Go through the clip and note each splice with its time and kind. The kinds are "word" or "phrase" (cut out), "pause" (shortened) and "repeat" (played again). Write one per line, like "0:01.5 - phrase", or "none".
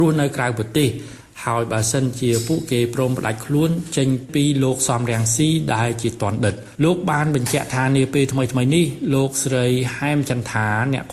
0:06.7 - pause